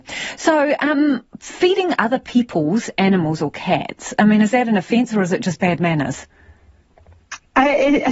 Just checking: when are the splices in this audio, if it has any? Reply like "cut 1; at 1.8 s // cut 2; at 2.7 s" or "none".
cut 1; at 1.3 s